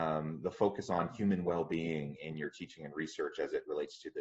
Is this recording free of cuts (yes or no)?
yes